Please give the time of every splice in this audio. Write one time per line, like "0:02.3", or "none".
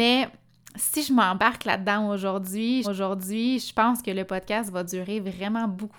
0:02.8